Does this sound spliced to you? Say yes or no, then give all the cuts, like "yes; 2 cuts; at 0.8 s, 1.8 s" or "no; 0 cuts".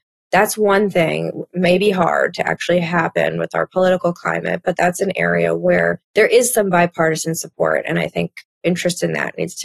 yes; 1 cut; at 6.0 s